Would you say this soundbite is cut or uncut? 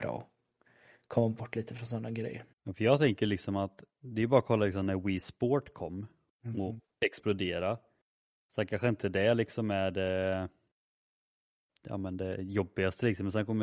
cut